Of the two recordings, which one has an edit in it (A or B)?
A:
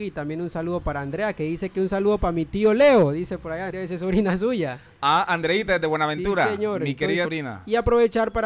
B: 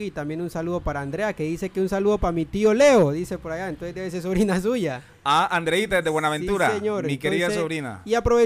A